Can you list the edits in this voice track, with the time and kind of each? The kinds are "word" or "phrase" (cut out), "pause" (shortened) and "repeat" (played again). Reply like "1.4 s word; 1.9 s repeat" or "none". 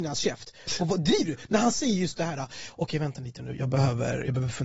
none